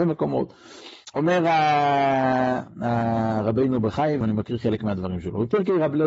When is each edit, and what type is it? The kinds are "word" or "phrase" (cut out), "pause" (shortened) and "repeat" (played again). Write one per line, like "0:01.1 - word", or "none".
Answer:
0:04.2 - word